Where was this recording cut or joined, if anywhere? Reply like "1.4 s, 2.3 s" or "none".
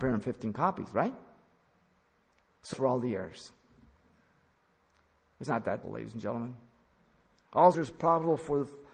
2.7 s, 5.5 s, 5.8 s, 7.7 s